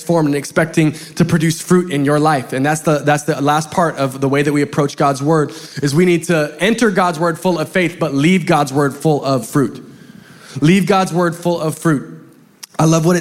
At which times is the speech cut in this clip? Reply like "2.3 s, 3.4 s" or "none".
none